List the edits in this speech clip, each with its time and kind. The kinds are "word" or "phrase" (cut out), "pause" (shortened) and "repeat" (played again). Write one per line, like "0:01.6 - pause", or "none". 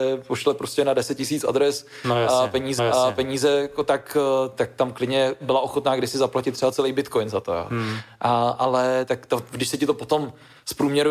0:02.8 - repeat